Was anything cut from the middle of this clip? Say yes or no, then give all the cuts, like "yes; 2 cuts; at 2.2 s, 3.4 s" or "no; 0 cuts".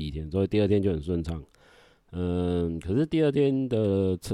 no; 0 cuts